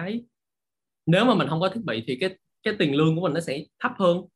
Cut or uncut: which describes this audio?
uncut